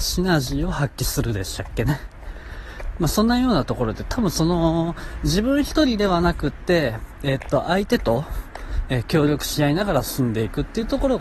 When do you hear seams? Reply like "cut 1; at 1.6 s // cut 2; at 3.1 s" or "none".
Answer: none